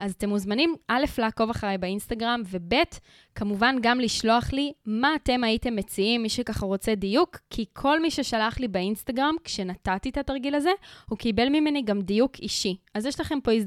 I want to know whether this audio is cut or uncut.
uncut